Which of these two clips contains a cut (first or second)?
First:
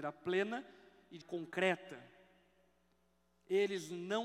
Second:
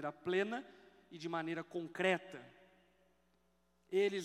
first